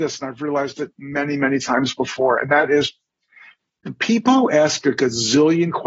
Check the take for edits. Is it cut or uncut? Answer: uncut